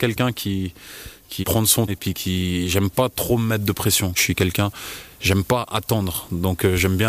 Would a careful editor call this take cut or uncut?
cut